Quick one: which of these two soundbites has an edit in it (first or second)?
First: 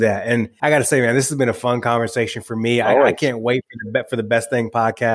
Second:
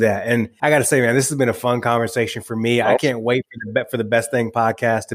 second